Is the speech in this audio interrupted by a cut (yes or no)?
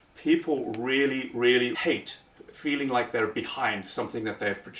yes